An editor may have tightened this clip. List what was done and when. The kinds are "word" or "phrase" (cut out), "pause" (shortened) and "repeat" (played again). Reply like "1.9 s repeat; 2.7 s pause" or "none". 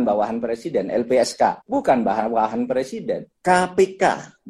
1.6 s pause; 3.3 s pause